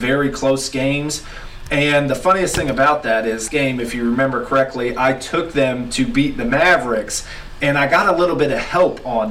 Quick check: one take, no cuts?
no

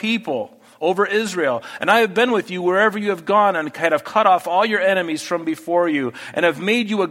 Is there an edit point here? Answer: no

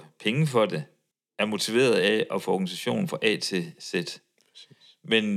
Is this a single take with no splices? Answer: no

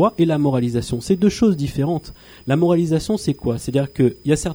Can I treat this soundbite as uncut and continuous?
yes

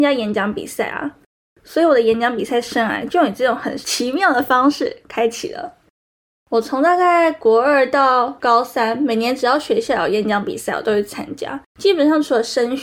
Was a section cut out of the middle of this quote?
yes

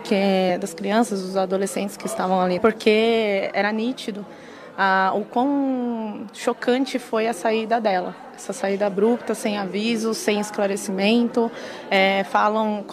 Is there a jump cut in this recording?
yes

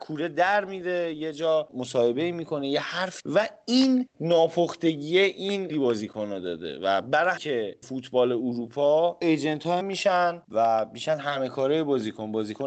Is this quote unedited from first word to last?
no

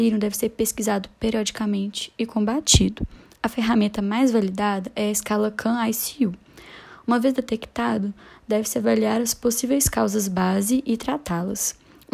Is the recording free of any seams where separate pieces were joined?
yes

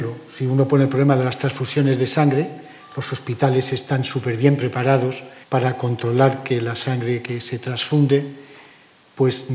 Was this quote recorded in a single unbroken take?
no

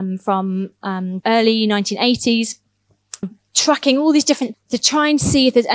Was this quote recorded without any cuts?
no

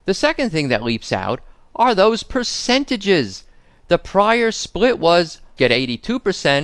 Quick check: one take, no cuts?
no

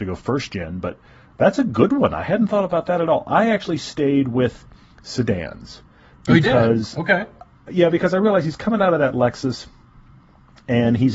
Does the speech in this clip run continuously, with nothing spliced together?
yes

